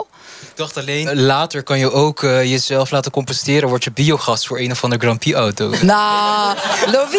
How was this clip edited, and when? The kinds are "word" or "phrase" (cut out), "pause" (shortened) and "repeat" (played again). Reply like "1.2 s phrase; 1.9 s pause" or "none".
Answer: 1.1 s word